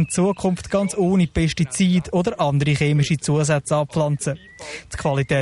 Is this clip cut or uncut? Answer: uncut